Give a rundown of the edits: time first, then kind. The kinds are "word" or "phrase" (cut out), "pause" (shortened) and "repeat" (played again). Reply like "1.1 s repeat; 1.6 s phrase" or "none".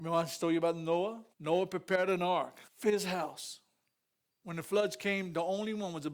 1.3 s pause; 2.7 s pause